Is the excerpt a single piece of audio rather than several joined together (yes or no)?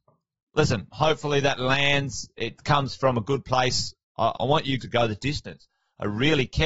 no